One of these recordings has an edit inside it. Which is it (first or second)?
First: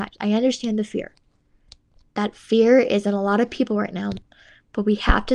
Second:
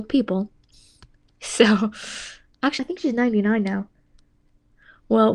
second